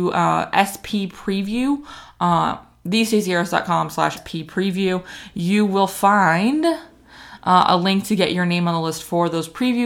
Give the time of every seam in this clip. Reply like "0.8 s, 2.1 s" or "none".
4.2 s